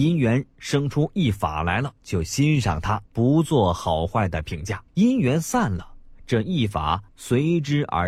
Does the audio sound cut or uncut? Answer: cut